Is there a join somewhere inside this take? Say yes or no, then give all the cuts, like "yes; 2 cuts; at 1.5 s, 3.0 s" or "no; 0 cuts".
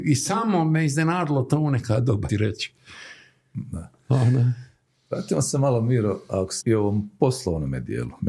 yes; 2 cuts; at 2.3 s, 6.6 s